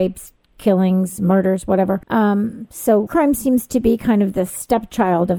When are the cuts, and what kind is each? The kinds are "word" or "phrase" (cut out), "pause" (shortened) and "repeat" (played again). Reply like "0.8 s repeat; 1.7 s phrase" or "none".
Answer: 2.0 s pause; 3.1 s phrase